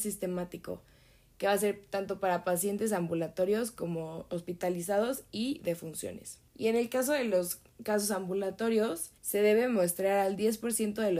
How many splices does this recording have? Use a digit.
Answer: 2